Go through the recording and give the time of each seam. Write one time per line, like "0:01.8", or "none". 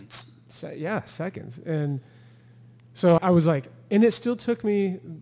0:03.2